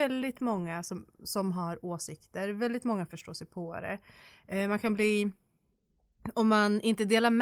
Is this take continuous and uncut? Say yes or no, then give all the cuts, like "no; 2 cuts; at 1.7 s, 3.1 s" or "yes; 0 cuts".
yes; 0 cuts